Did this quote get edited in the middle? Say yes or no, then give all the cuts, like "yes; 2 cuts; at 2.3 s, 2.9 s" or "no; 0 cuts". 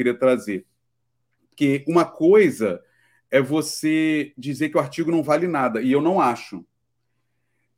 no; 0 cuts